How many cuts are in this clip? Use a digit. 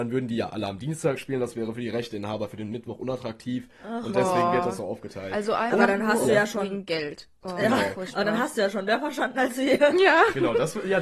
1